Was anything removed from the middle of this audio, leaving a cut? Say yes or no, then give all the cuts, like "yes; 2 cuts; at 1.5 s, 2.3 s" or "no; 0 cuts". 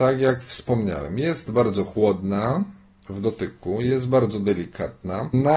no; 0 cuts